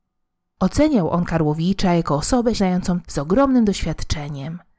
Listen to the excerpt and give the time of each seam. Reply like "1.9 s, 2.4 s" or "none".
2.6 s, 3.0 s